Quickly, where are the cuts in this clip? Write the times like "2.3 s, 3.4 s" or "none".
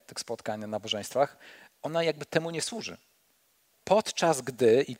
none